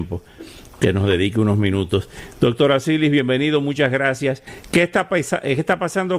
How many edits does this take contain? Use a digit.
0